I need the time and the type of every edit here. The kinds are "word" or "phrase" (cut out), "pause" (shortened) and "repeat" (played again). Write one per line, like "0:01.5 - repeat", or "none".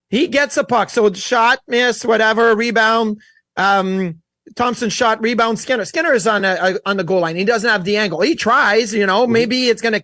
none